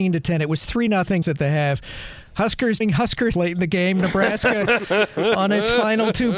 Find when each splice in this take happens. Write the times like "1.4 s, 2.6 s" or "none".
1.2 s, 2.8 s, 3.3 s

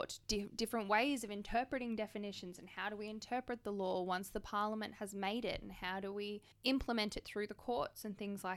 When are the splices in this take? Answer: 6.5 s

